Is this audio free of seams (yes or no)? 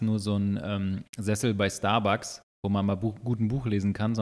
yes